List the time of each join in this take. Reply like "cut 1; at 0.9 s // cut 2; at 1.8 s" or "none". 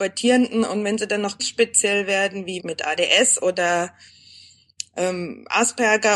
cut 1; at 1.4 s // cut 2; at 2.6 s